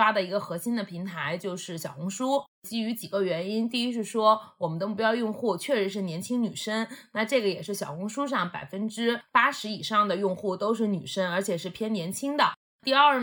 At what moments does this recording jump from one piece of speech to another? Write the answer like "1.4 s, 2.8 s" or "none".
none